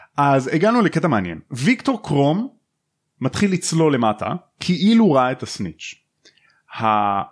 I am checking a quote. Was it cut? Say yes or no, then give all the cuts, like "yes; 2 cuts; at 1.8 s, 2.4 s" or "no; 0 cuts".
no; 0 cuts